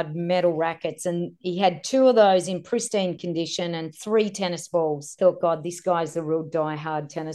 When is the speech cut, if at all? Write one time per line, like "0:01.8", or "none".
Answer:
none